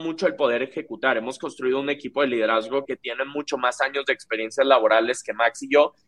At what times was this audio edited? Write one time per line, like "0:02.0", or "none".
0:02.8